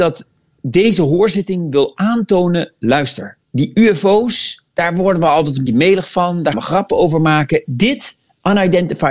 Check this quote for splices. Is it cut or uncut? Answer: cut